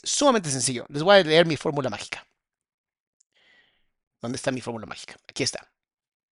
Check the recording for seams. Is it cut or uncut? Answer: uncut